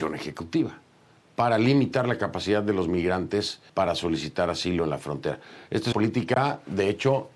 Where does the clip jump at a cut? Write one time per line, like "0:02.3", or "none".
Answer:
0:03.7
0:05.9